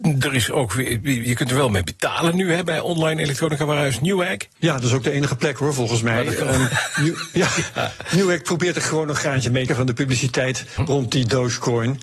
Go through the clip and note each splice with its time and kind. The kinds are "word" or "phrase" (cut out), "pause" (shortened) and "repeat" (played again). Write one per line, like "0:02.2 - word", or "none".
0:04.5 - pause
0:09.7 - phrase
0:10.8 - word